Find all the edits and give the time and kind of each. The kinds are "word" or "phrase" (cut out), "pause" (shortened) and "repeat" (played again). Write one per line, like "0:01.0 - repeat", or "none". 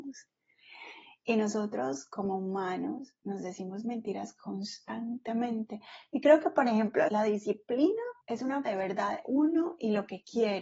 0:07.1 - word
0:08.2 - pause
0:08.7 - word
0:09.2 - word